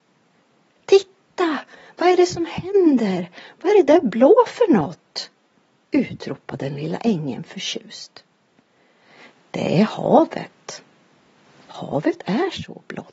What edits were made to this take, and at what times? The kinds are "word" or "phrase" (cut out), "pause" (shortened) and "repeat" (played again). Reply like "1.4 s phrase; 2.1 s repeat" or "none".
none